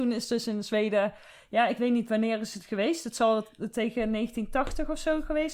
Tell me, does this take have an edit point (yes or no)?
no